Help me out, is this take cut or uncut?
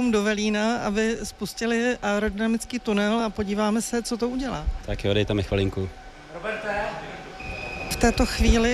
uncut